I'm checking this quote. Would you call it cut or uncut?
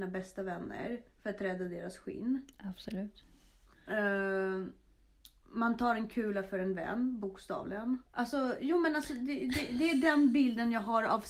cut